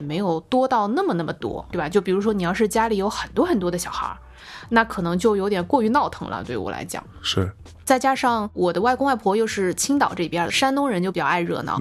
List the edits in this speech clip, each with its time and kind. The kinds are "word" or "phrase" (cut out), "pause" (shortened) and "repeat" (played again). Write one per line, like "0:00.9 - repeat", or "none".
0:01.7 - word